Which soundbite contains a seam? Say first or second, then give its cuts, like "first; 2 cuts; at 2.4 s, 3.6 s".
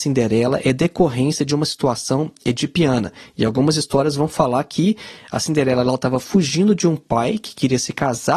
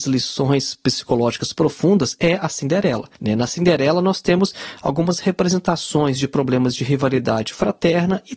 second; 1 cut; at 3.1 s